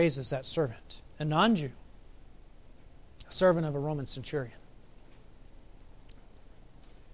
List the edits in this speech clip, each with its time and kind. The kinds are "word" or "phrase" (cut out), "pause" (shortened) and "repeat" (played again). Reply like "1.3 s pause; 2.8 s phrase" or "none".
1.1 s pause